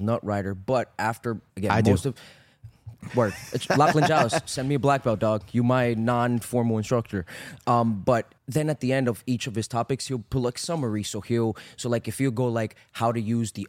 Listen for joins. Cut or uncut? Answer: cut